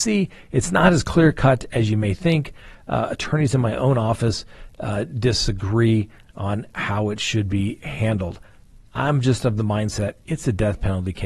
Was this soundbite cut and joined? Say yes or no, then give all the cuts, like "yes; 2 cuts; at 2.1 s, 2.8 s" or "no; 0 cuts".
no; 0 cuts